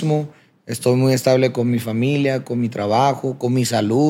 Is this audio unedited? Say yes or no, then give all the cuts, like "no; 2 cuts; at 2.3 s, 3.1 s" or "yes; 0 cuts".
yes; 0 cuts